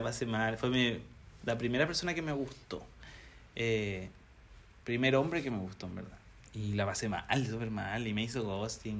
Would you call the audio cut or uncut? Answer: uncut